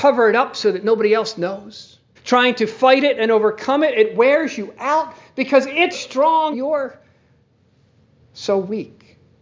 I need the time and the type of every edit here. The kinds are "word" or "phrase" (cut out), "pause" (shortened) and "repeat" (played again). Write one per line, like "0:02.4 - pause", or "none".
0:02.2 - pause
0:05.9 - word
0:06.5 - word

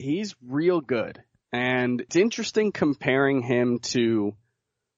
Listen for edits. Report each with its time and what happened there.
0:02.1 - word

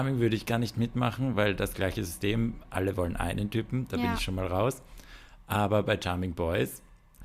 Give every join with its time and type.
none

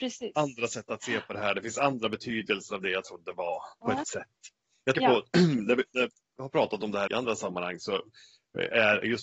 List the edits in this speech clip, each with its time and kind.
0:04.0 - word
0:04.9 - word
0:07.1 - word

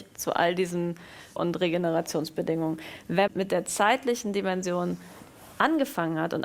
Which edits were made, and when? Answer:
0:01.4 - word
0:03.3 - word

